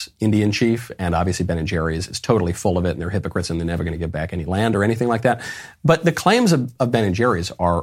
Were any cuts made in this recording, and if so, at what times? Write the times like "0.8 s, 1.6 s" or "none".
none